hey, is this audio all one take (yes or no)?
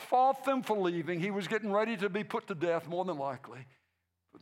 yes